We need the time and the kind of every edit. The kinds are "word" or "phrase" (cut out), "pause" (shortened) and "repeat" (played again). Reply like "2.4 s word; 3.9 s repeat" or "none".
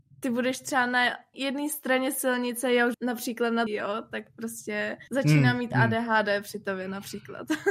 1.3 s word; 2.9 s phrase; 3.7 s word; 5.1 s pause